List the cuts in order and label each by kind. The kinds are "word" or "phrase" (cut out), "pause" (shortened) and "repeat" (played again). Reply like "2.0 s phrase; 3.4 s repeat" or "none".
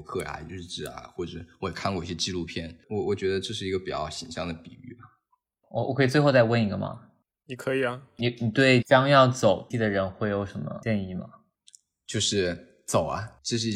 9.7 s word